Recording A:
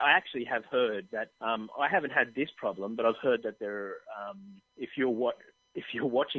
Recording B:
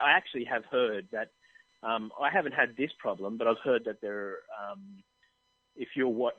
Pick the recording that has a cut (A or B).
A